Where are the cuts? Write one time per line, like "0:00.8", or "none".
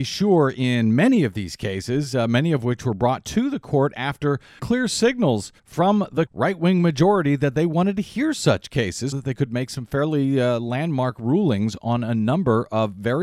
0:04.6
0:05.6
0:06.3
0:09.1